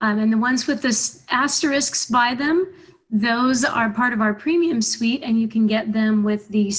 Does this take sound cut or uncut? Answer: uncut